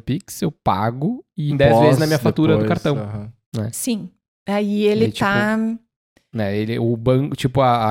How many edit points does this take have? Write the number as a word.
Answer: two